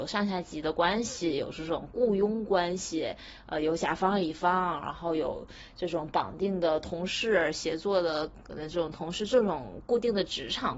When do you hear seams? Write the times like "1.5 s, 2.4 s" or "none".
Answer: none